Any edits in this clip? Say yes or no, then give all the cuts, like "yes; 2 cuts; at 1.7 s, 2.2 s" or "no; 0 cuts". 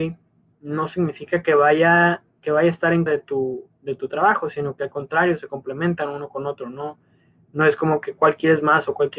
yes; 1 cut; at 3.1 s